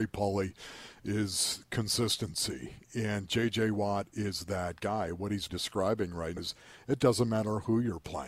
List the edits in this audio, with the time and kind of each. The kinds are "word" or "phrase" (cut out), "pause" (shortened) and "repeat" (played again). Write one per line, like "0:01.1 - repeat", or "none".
0:05.5 - word
0:06.4 - word